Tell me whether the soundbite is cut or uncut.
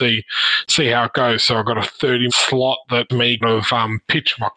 cut